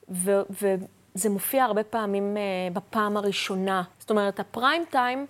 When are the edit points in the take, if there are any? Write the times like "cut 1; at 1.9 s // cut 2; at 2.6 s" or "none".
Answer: cut 1; at 3.9 s